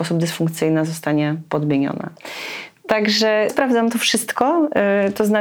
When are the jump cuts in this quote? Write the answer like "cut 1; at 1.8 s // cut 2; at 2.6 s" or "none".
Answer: cut 1; at 3.5 s